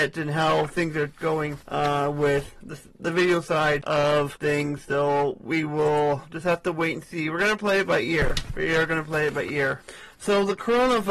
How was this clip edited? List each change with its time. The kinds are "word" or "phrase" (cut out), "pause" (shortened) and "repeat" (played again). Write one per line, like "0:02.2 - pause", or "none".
none